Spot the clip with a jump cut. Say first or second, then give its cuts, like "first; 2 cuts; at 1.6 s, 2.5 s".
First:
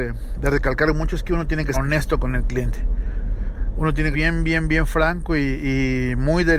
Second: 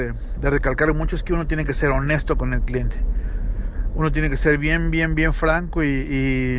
first; 2 cuts; at 1.7 s, 4.1 s